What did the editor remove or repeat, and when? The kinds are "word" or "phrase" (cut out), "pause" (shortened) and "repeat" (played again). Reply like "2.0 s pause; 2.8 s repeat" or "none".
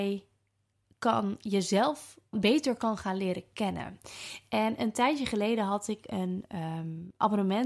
2.3 s word